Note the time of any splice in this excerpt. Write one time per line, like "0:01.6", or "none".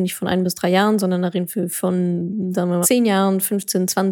0:02.8